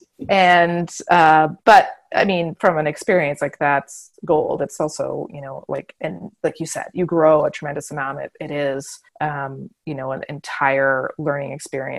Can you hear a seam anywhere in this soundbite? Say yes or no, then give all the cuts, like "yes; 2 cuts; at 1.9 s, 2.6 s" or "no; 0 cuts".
yes; 2 cuts; at 1.6 s, 9.1 s